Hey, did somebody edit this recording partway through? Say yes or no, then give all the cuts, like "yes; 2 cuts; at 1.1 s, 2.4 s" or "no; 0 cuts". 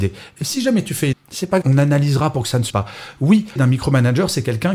yes; 4 cuts; at 1.1 s, 1.6 s, 2.7 s, 3.6 s